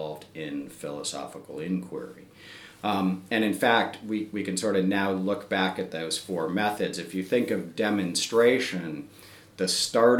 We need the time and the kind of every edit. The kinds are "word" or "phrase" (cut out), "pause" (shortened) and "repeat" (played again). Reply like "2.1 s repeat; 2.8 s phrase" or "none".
none